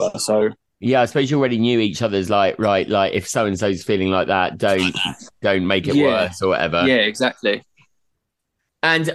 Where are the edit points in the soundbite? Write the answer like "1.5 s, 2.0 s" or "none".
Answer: none